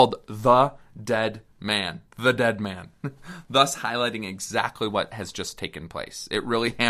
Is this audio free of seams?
no; 1 cut; at 2.1 s

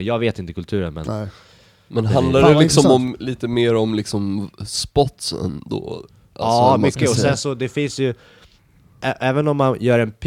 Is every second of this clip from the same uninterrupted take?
yes; 0 cuts

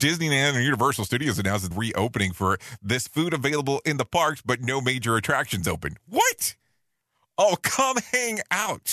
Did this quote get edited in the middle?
yes; 2 cuts; at 1.7 s, 3.1 s

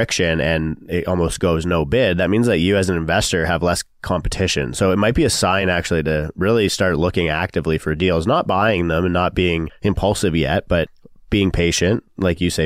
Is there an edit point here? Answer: no; 0 cuts

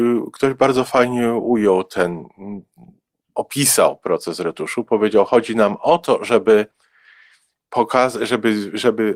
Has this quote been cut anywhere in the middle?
no; 0 cuts

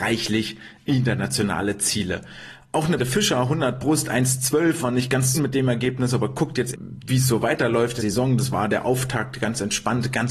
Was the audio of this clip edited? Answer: yes; 4 cuts; at 3.0 s, 5.3 s, 6.7 s, 8.0 s

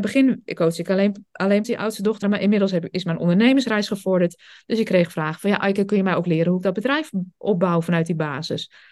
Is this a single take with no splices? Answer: no; 2 cuts; at 1.6 s, 2.2 s

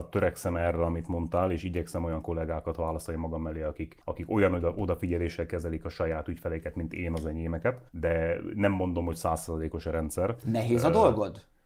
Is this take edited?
yes; 2 cuts; at 4.0 s, 7.9 s

